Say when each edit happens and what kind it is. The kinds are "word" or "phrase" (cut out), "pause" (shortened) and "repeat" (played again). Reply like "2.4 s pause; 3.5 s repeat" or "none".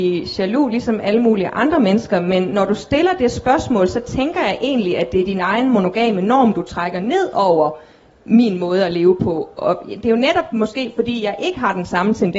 none